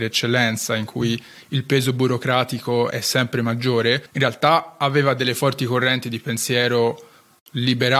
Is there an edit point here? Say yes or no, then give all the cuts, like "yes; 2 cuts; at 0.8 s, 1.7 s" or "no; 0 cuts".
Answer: yes; 2 cuts; at 2.9 s, 4.1 s